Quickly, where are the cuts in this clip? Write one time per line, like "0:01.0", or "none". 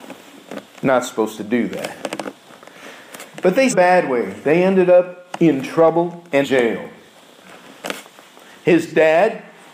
0:03.7
0:06.4